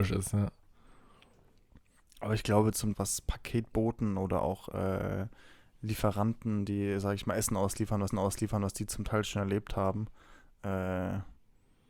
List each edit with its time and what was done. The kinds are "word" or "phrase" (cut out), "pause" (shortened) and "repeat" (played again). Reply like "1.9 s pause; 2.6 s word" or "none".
2.9 s phrase; 8.1 s repeat